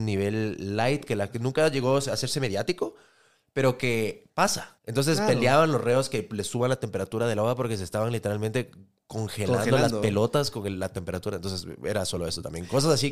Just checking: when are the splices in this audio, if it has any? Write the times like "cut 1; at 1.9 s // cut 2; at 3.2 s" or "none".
cut 1; at 4.8 s